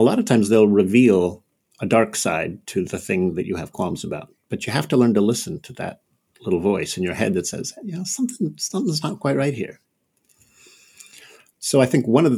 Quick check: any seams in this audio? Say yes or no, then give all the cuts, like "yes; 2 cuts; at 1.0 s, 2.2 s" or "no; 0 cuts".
no; 0 cuts